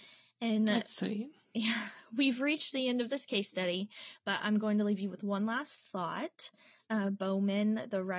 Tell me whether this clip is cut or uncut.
uncut